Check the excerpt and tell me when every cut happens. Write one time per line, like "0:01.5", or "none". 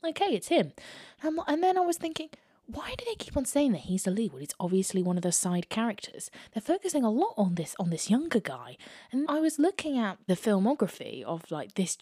0:09.3